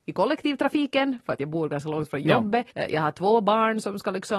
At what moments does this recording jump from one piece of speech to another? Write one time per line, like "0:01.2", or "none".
0:02.7